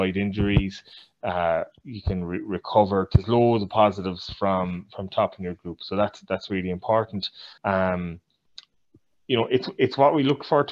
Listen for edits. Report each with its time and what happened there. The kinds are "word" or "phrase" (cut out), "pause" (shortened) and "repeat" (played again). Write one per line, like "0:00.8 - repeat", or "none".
0:07.6 - pause